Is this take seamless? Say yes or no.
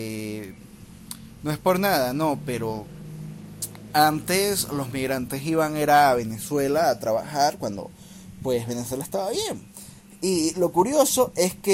yes